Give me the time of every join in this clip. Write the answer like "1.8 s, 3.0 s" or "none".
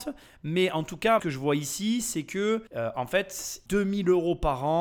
1.2 s, 2.7 s, 3.7 s